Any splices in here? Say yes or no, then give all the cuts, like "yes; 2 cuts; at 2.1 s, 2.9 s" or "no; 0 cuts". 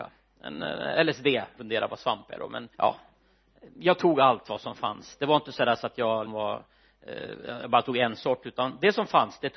yes; 3 cuts; at 1.6 s, 2.7 s, 6.3 s